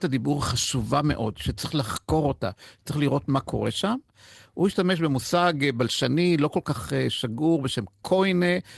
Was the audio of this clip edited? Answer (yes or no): no